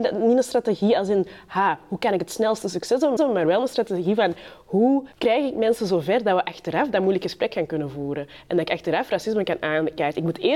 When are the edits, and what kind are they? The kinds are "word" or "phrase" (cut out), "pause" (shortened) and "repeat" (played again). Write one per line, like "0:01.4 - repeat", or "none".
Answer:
0:03.2 - repeat
0:05.1 - pause